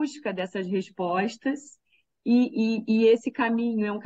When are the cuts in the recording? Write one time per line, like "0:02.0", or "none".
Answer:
none